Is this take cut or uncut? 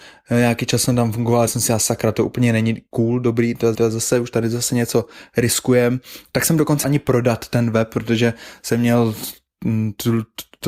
cut